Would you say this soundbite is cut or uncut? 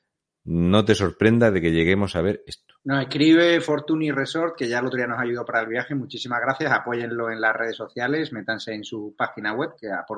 cut